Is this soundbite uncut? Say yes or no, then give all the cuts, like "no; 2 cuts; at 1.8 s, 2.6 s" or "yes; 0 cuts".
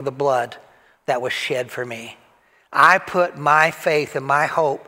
yes; 0 cuts